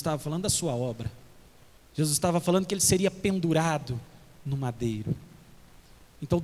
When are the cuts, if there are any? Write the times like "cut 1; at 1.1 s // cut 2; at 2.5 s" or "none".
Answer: none